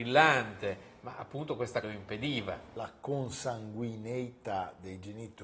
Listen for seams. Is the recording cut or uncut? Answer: cut